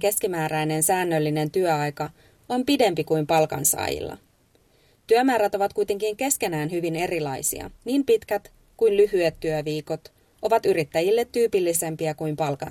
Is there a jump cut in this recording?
yes; 1 cut; at 7.8 s

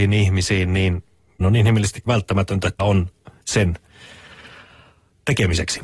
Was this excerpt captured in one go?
no; 4 cuts; at 1.4 s, 2.1 s, 2.8 s, 3.4 s

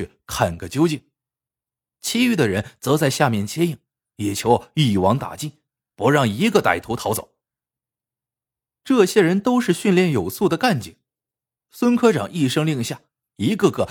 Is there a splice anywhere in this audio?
no; 0 cuts

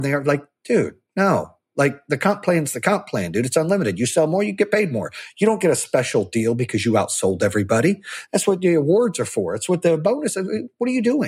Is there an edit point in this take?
no; 0 cuts

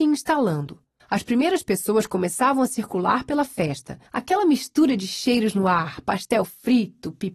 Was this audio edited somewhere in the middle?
yes; 2 cuts; at 1.0 s, 4.1 s

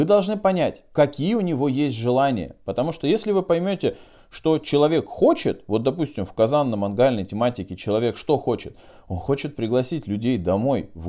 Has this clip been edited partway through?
no; 0 cuts

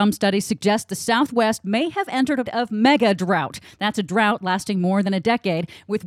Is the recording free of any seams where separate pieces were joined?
no; 1 cut; at 2.5 s

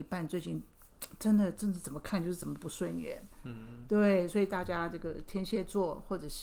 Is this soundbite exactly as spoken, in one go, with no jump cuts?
yes; 0 cuts

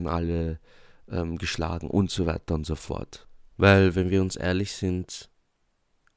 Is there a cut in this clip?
no; 0 cuts

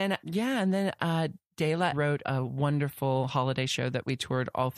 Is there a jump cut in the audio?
yes; 2 cuts; at 1.9 s, 2.2 s

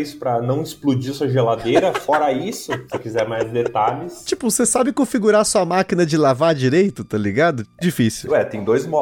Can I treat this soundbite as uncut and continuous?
no; 1 cut; at 7.8 s

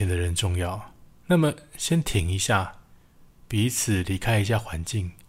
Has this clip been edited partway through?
no; 0 cuts

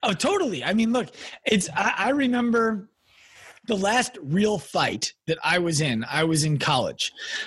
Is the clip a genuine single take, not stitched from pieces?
yes; 0 cuts

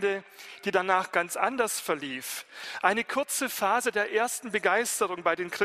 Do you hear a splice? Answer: no; 0 cuts

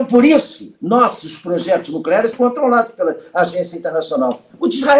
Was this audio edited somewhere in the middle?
yes; 1 cut; at 2.3 s

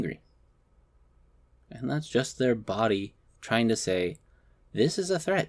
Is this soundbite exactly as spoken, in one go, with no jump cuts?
yes; 0 cuts

